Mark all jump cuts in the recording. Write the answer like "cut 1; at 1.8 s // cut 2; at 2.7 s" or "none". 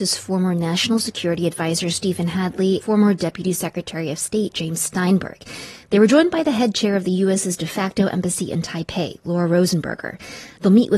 cut 1; at 2.8 s